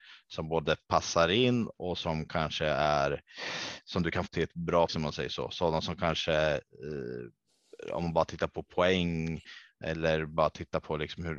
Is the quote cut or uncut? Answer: cut